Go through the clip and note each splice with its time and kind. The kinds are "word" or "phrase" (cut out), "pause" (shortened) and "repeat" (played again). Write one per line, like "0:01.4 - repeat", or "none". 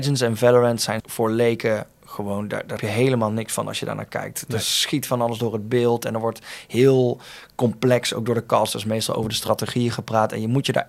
0:01.0 - phrase
0:02.8 - word